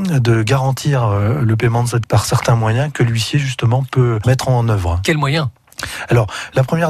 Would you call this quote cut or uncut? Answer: cut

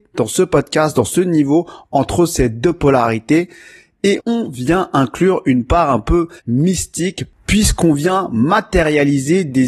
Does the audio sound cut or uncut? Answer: cut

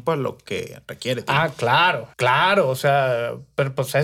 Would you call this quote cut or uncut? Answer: cut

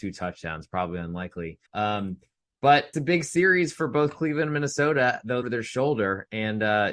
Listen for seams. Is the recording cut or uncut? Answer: cut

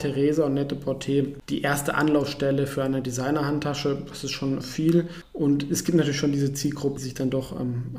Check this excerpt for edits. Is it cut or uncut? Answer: cut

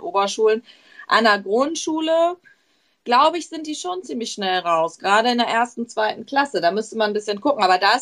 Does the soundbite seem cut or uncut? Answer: uncut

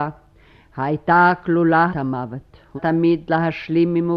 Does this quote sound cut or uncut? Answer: cut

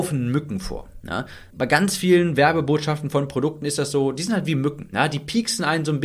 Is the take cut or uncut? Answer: cut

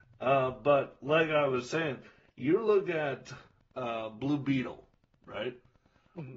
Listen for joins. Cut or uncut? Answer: uncut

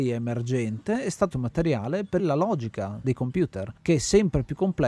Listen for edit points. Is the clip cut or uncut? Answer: cut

